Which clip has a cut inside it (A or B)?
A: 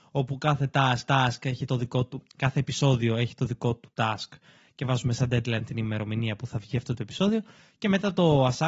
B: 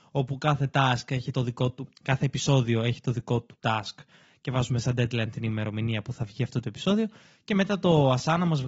A